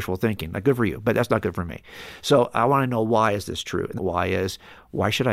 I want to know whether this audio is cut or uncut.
cut